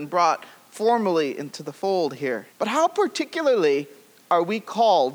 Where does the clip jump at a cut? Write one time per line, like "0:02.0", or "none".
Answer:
0:02.5